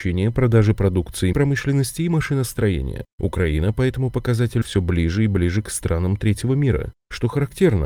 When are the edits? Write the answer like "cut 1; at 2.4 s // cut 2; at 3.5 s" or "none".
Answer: cut 1; at 1.3 s // cut 2; at 4.6 s